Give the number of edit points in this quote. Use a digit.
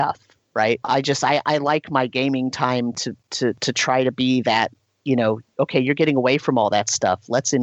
0